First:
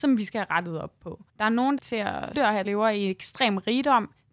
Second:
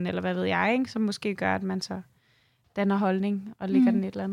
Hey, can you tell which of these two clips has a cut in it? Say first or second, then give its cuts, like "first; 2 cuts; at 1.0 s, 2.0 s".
first; 4 cuts; at 1.3 s, 1.8 s, 2.3 s, 2.6 s